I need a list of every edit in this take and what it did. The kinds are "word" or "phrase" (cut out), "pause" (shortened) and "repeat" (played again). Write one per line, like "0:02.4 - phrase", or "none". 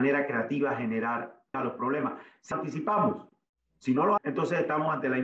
0:01.5 - word
0:02.5 - word
0:04.2 - word